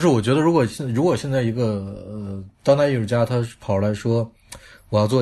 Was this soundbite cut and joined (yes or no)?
yes